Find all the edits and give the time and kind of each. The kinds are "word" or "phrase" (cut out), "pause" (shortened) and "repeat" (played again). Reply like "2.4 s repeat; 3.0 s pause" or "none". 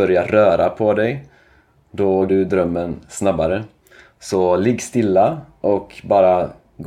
2.3 s word